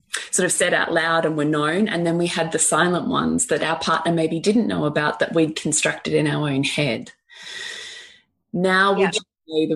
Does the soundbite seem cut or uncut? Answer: uncut